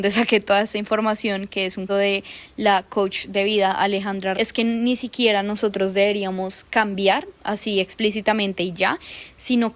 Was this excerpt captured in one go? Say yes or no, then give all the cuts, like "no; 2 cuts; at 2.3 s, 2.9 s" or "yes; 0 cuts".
no; 2 cuts; at 1.9 s, 4.3 s